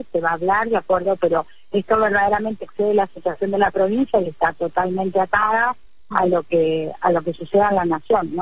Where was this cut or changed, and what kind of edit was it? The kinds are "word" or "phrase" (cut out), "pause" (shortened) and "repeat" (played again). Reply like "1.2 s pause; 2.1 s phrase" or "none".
none